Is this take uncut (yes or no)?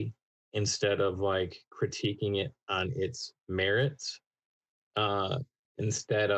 yes